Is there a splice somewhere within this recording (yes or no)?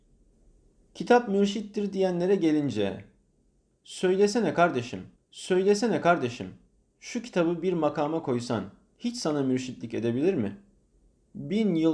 yes